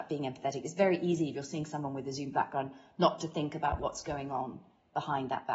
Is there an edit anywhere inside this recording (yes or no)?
no